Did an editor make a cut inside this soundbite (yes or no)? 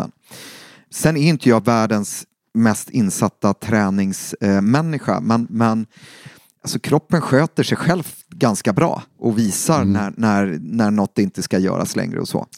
no